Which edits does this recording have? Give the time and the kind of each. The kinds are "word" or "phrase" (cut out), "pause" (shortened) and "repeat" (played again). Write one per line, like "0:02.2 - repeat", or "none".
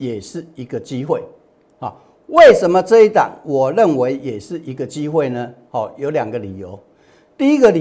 none